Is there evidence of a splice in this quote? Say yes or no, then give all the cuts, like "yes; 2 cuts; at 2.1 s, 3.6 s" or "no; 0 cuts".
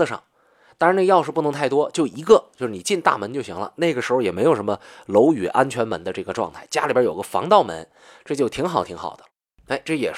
no; 0 cuts